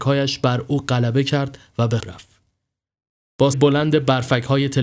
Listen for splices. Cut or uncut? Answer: cut